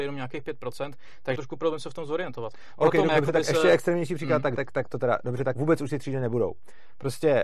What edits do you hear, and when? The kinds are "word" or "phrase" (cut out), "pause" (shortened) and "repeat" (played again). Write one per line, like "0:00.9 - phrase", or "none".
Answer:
0:01.4 - word
0:03.1 - word
0:04.6 - word
0:05.5 - word